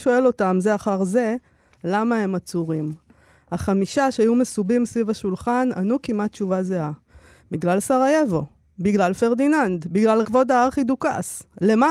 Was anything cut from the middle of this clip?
yes; 1 cut; at 10.2 s

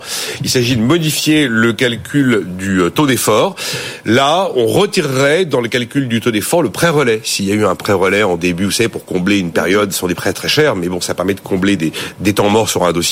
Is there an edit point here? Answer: no; 0 cuts

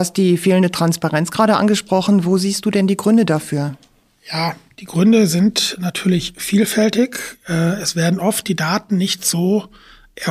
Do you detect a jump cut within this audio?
no; 0 cuts

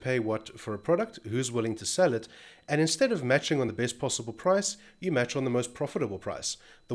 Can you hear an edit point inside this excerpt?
no; 0 cuts

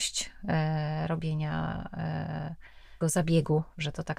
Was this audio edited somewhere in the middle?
yes; 1 cut; at 3.0 s

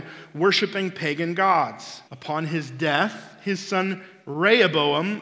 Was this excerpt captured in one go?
no; 1 cut; at 2.1 s

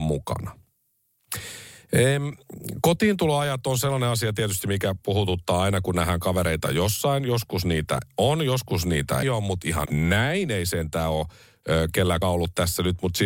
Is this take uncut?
no; 3 cuts; at 9.2 s, 9.9 s, 12.2 s

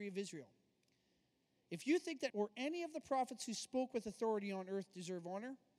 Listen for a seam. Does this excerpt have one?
yes; 1 cut; at 2.3 s

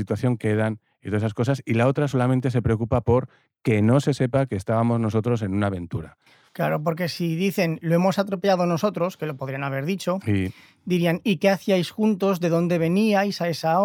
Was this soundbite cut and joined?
no; 0 cuts

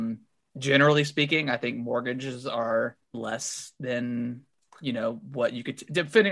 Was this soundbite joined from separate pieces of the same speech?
yes; 1 cut; at 3.0 s

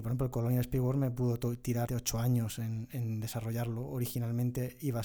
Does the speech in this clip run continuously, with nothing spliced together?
no; 1 cut; at 1.9 s

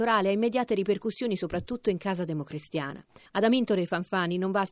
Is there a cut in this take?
no; 0 cuts

